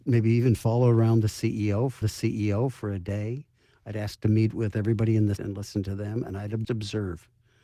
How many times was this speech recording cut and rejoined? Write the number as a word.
three